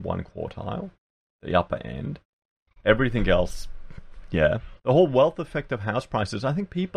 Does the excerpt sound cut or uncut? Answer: cut